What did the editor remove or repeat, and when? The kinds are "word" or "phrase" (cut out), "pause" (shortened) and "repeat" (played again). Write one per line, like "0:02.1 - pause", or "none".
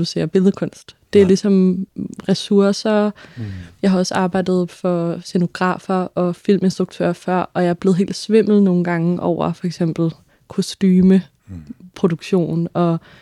none